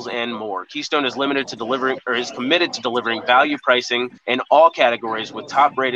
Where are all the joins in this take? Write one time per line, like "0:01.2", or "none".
0:04.2